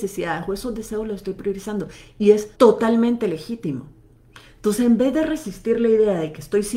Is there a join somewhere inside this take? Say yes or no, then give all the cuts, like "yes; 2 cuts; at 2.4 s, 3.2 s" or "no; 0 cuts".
yes; 1 cut; at 2.5 s